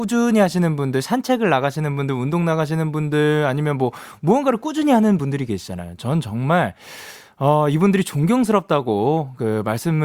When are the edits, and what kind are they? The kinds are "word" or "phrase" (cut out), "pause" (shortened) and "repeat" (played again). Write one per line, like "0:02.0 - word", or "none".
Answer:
none